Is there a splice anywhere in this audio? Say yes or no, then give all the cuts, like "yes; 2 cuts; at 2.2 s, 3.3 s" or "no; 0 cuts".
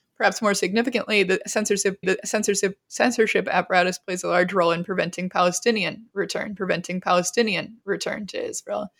yes; 2 cuts; at 2.0 s, 6.6 s